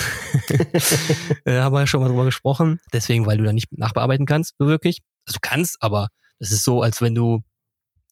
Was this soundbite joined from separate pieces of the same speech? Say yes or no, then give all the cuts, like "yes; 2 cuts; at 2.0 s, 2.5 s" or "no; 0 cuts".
yes; 1 cut; at 2.9 s